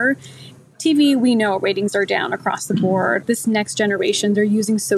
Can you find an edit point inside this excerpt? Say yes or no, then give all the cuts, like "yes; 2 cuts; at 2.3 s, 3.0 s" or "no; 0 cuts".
no; 0 cuts